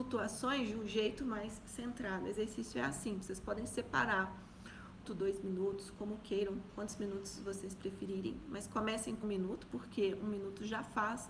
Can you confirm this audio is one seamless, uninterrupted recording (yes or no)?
no